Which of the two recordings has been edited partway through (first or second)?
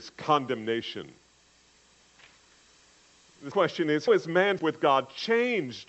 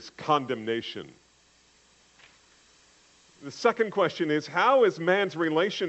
first